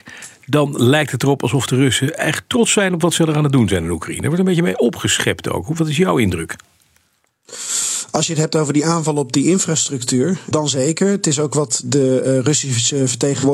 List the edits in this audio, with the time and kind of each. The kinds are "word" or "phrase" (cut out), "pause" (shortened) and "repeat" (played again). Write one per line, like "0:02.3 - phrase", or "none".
0:10.5 - word